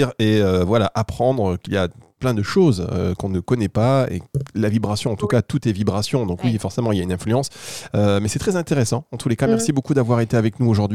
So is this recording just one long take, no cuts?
yes; 0 cuts

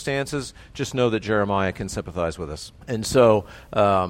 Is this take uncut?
no; 1 cut; at 2.8 s

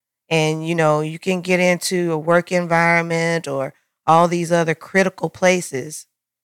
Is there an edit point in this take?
no; 0 cuts

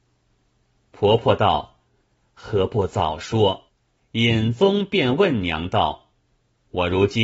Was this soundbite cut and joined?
yes; 1 cut; at 3.7 s

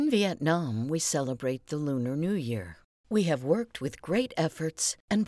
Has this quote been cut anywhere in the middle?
no; 0 cuts

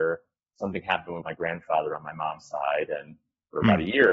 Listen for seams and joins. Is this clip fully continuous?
no; 1 cut; at 1.2 s

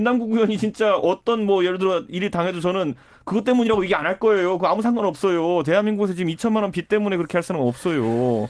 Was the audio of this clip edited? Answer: no; 0 cuts

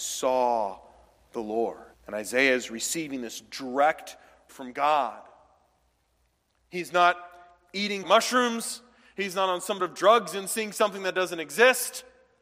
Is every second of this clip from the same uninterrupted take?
no; 4 cuts; at 1.9 s, 4.5 s, 8.0 s, 9.8 s

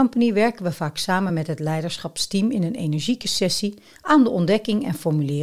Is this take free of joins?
yes; 0 cuts

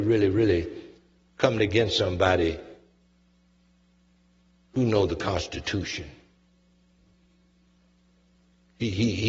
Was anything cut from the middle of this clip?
no; 0 cuts

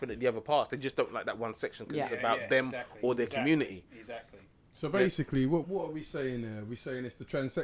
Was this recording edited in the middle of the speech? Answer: yes; 1 cut; at 5.6 s

